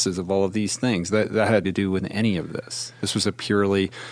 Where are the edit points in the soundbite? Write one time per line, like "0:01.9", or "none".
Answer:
0:01.6